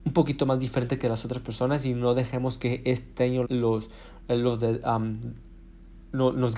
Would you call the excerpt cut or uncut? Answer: cut